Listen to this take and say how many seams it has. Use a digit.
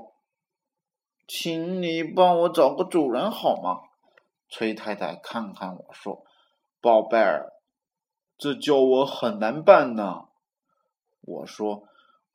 0